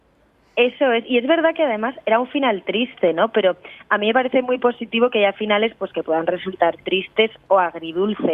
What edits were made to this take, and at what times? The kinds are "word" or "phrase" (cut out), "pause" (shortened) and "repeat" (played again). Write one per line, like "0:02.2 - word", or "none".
none